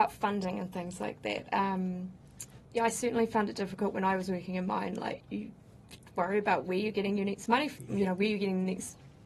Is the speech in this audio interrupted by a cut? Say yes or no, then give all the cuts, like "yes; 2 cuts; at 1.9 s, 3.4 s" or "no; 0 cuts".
yes; 2 cuts; at 2.6 s, 5.2 s